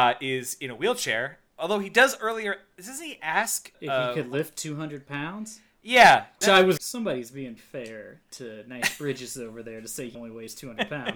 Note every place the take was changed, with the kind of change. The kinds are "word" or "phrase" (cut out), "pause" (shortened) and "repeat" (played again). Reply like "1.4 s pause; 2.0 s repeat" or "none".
3.7 s word; 6.4 s word; 6.8 s word; 7.6 s word; 10.1 s word